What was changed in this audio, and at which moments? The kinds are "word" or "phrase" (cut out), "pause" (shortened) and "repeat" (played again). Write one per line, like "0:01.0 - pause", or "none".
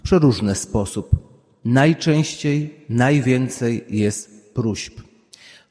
none